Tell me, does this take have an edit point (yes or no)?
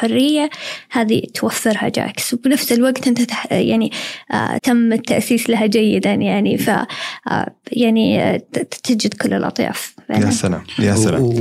yes